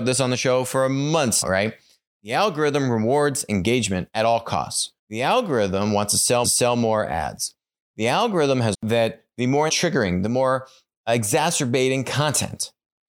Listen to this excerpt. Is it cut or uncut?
cut